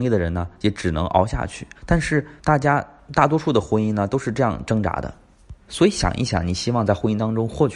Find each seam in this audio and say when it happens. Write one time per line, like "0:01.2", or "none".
0:01.8
0:02.4
0:05.6